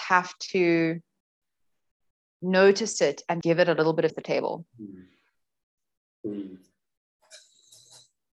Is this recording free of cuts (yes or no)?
no